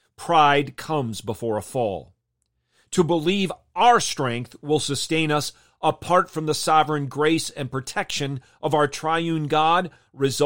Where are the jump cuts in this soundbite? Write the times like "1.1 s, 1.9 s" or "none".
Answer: none